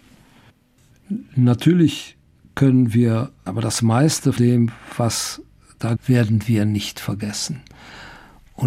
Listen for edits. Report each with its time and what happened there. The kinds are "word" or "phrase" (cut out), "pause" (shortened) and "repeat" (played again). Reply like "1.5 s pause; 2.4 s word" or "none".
3.5 s word; 4.4 s word; 6.0 s word